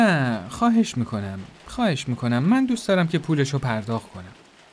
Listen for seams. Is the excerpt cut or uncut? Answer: uncut